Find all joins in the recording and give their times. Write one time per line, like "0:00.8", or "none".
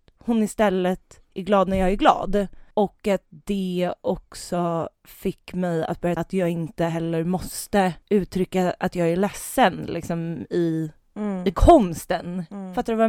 0:02.7
0:06.2
0:08.0